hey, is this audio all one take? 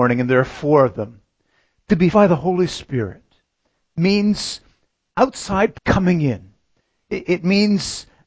no; 2 cuts; at 2.1 s, 5.7 s

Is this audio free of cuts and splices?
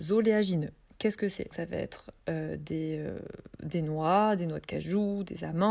no; 1 cut; at 1.5 s

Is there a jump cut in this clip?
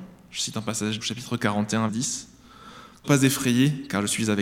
yes; 3 cuts; at 1.0 s, 1.9 s, 3.0 s

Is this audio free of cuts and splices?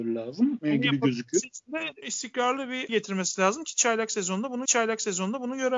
no; 3 cuts; at 2.0 s, 2.9 s, 4.6 s

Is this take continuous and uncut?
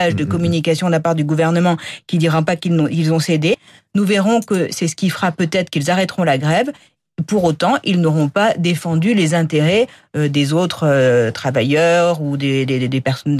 yes; 0 cuts

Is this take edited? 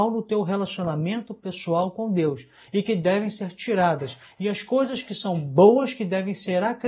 no; 0 cuts

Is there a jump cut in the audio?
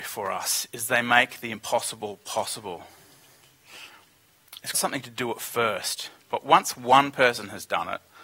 yes; 1 cut; at 4.7 s

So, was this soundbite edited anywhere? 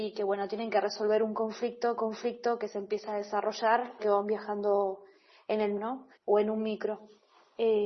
yes; 4 cuts; at 2.0 s, 4.0 s, 5.8 s, 6.2 s

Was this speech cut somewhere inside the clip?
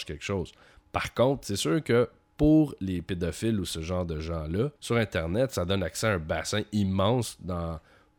yes; 1 cut; at 4.8 s

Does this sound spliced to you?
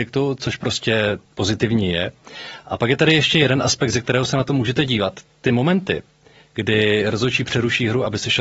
no; 0 cuts

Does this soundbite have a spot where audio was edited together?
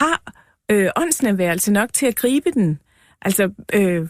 no; 0 cuts

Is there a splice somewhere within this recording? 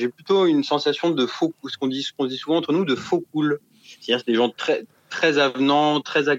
no; 0 cuts

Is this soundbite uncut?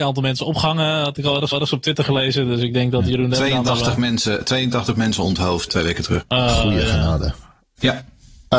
no; 2 cuts; at 1.5 s, 5.7 s

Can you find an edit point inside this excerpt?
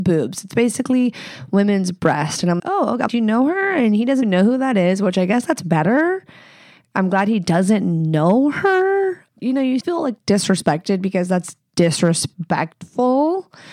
yes; 5 cuts; at 2.6 s, 3.1 s, 4.2 s, 9.4 s, 9.8 s

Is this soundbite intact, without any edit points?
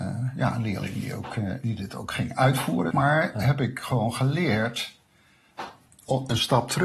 no; 2 cuts; at 1.6 s, 2.9 s

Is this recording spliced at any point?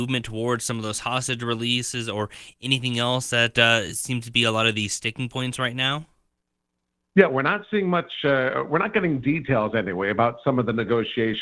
no; 0 cuts

